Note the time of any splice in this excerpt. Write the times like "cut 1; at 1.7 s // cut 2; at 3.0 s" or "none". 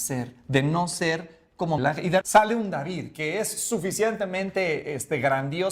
cut 1; at 1.8 s // cut 2; at 2.2 s